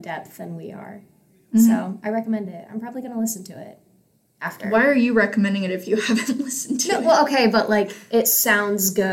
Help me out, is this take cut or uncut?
uncut